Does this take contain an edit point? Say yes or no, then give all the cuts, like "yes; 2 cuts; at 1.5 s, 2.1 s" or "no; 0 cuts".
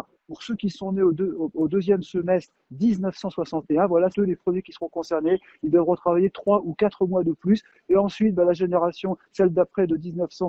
yes; 1 cut; at 4.1 s